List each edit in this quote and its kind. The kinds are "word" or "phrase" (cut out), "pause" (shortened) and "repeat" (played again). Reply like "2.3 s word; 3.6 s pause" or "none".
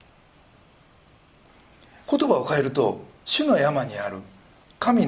3.2 s pause